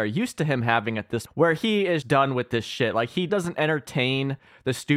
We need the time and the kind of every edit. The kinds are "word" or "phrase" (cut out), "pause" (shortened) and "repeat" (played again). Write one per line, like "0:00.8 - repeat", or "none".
0:01.3 - word
0:02.0 - word
0:03.3 - word